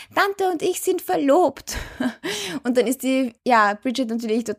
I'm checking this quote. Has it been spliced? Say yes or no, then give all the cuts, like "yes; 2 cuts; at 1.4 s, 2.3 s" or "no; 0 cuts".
yes; 1 cut; at 3.4 s